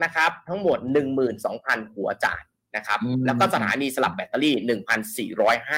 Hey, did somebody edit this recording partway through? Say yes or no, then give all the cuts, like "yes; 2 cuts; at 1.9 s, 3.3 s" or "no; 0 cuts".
no; 0 cuts